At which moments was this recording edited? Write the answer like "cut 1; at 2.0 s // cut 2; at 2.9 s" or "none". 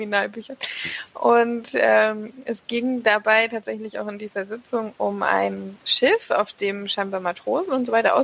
none